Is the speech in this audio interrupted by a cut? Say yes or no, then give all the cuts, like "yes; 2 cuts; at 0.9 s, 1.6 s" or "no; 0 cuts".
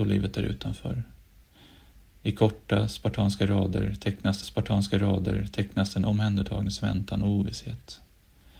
yes; 1 cut; at 4.4 s